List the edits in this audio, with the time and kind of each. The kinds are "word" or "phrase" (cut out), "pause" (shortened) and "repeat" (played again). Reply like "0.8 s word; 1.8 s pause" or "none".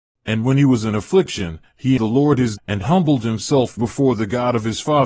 2.0 s word; 2.6 s word; 3.8 s word